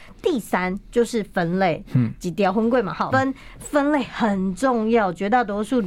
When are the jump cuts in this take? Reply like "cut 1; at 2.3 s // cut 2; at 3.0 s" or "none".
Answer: cut 1; at 3.1 s